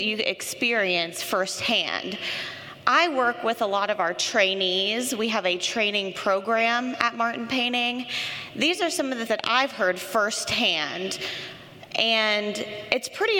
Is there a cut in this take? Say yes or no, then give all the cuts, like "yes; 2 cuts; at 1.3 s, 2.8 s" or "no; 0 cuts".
yes; 1 cut; at 9.3 s